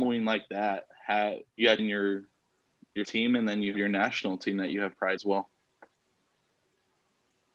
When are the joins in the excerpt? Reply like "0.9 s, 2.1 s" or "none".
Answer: 1.5 s, 1.8 s, 3.0 s, 3.7 s, 5.2 s